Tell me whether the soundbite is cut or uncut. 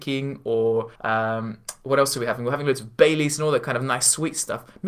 cut